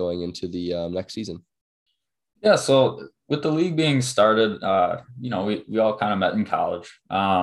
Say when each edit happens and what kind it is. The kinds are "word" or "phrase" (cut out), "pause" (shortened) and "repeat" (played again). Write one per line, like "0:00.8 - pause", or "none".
none